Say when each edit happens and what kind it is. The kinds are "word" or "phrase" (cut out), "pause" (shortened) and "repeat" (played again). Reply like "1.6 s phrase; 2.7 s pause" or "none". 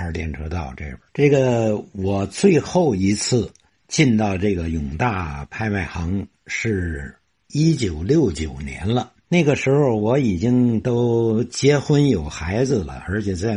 1.1 s pause; 6.3 s pause; 9.2 s pause